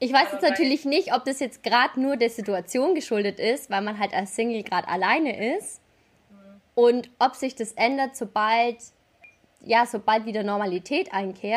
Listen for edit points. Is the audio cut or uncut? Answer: uncut